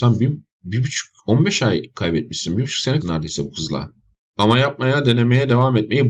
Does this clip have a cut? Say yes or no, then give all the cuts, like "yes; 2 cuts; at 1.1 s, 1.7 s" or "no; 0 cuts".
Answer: yes; 3 cuts; at 1.2 s, 3.0 s, 4.2 s